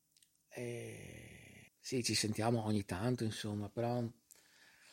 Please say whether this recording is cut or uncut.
cut